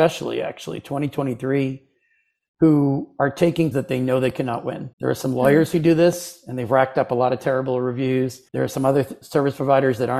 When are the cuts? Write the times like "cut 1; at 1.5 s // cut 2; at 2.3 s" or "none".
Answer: cut 1; at 3.7 s // cut 2; at 4.9 s // cut 3; at 8.5 s